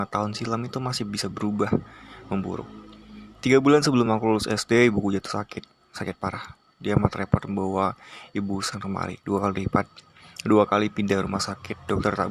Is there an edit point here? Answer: no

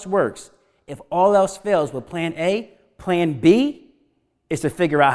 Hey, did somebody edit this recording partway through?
no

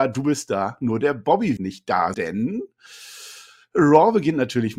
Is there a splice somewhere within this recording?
yes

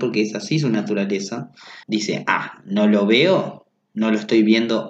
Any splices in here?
yes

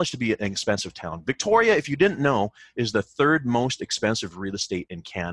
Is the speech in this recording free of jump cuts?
yes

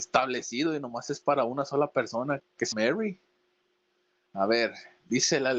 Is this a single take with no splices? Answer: no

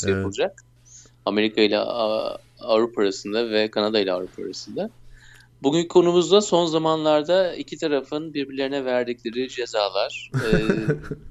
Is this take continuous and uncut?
yes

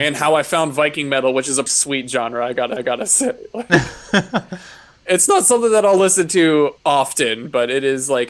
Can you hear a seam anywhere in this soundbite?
yes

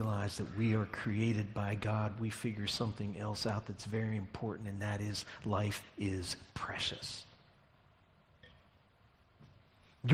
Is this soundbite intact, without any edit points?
yes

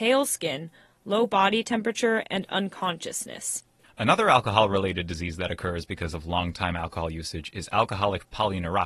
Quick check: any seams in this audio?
no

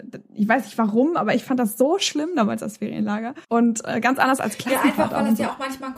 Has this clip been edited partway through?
yes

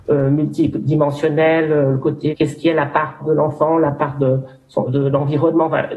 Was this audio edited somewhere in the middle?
yes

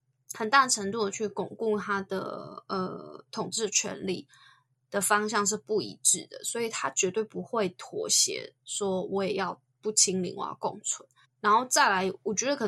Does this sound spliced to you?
yes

